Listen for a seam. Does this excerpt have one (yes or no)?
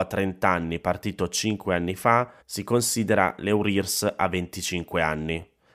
yes